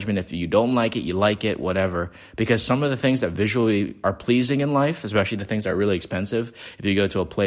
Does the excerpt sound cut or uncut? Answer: uncut